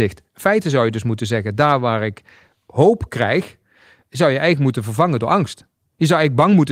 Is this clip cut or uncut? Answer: uncut